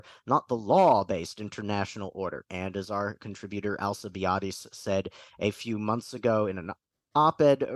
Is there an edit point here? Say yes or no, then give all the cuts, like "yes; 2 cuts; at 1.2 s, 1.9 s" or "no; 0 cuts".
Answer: no; 0 cuts